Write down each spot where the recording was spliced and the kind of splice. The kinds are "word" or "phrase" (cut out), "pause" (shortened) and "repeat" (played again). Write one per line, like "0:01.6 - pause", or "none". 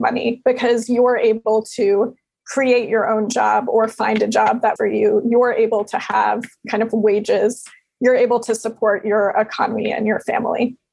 0:04.8 - word